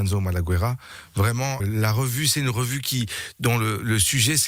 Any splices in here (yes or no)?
yes